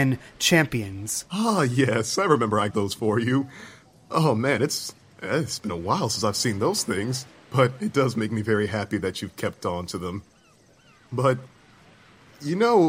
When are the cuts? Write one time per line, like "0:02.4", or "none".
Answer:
0:02.7